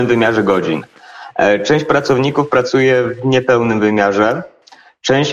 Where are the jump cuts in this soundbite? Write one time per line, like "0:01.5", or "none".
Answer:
none